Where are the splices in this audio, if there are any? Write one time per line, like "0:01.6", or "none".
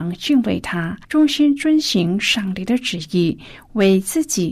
0:01.0